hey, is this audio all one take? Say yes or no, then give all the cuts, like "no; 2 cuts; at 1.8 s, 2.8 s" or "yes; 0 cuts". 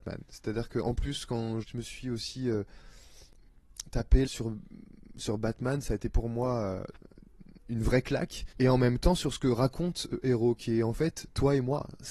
no; 4 cuts; at 1.6 s, 4.3 s, 7.6 s, 8.5 s